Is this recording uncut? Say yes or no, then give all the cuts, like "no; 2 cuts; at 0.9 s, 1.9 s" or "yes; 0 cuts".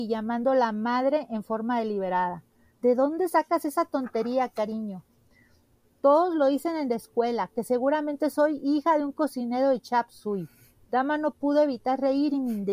yes; 0 cuts